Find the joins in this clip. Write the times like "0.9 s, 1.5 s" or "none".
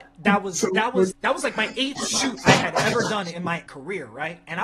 1.1 s, 3.7 s